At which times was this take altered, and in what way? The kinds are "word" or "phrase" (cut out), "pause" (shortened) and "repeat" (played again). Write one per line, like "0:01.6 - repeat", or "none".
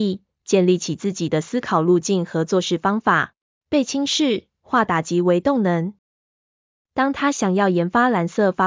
0:03.5 - pause